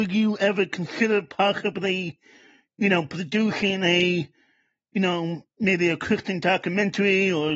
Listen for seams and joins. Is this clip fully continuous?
yes; 0 cuts

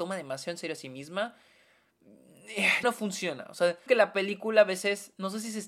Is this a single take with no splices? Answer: no; 2 cuts; at 2.8 s, 3.9 s

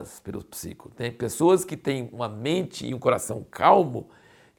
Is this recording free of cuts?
yes; 0 cuts

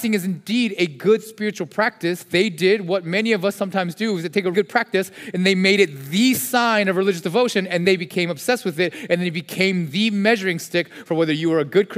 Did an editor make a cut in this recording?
yes; 2 cuts; at 4.5 s, 7.8 s

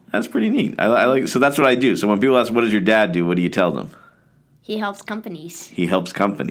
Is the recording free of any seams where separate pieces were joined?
yes; 0 cuts

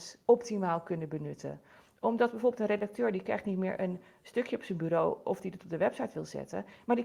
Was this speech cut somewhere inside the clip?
no; 0 cuts

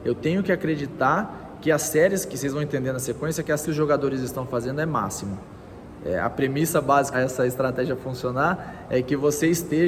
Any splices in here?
yes; 2 cuts; at 3.6 s, 7.1 s

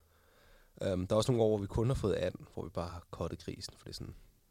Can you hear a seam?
no; 0 cuts

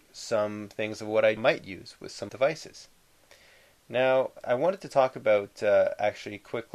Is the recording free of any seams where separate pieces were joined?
no; 3 cuts; at 1.4 s, 2.3 s, 4.4 s

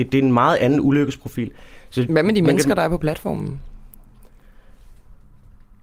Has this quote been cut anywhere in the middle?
no; 0 cuts

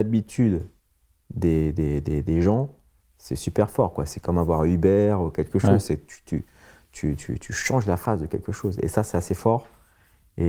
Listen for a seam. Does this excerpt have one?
no; 0 cuts

